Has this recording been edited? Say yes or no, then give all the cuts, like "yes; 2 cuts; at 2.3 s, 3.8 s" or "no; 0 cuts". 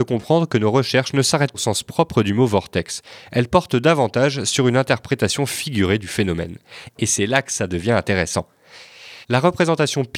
yes; 2 cuts; at 1.5 s, 9.2 s